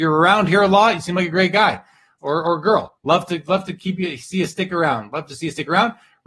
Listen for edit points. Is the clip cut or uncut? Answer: uncut